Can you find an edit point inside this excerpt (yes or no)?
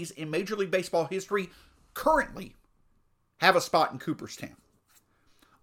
no